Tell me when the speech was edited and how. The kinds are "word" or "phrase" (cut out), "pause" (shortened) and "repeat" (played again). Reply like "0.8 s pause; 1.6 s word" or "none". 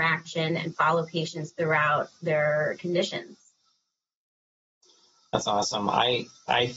none